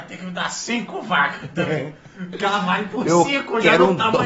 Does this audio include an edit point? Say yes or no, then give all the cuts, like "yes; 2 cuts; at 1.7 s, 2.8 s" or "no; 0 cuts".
no; 0 cuts